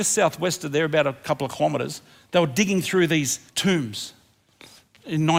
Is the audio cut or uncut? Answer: cut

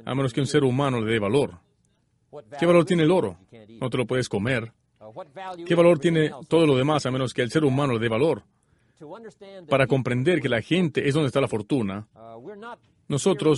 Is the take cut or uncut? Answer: uncut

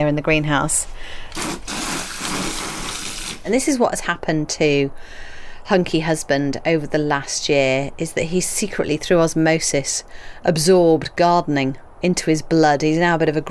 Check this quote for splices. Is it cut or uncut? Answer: uncut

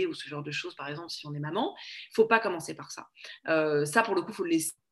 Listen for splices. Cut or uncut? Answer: uncut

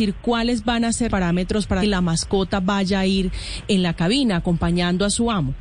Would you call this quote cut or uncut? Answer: cut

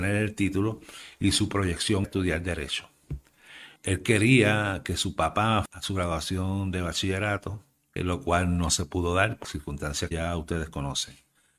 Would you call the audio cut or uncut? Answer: cut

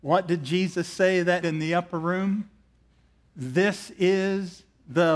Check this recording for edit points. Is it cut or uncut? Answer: cut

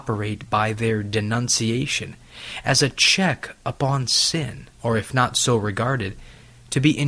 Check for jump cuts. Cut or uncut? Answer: cut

